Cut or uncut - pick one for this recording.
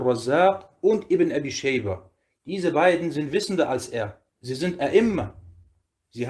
cut